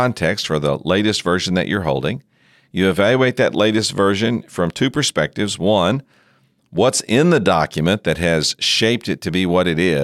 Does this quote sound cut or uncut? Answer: uncut